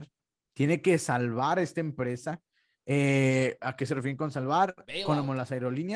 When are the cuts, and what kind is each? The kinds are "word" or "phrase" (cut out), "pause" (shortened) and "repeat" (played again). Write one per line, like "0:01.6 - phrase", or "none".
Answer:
none